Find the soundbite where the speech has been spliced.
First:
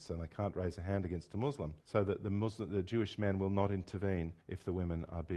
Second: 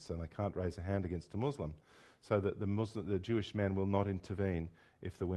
first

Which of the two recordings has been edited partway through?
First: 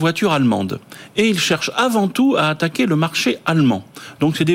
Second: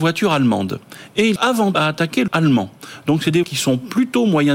second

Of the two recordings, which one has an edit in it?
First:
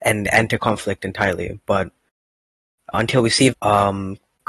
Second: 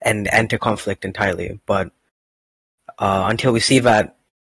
first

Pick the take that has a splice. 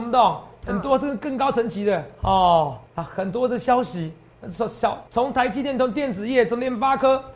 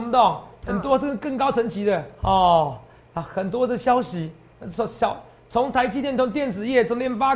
first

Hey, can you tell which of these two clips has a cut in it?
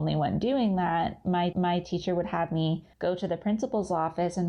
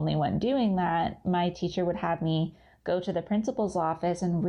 first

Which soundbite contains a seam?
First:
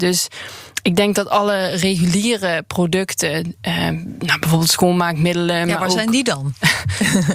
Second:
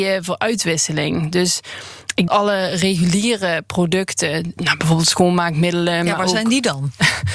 second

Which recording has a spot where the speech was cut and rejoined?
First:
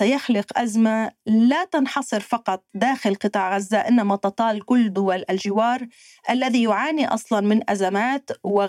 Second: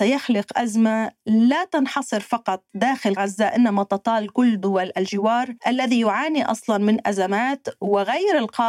second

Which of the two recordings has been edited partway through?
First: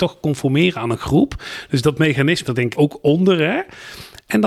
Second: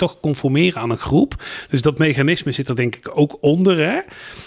first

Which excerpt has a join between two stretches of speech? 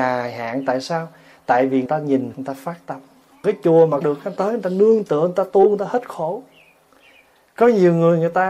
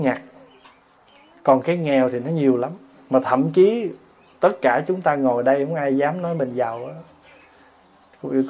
first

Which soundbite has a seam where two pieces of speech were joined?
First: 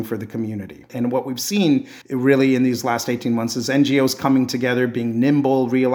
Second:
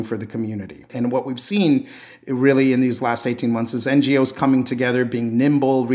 first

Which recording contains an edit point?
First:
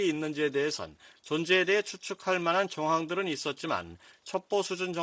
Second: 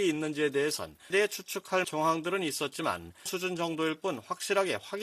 second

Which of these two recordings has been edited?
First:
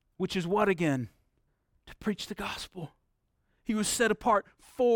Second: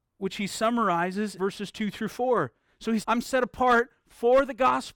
second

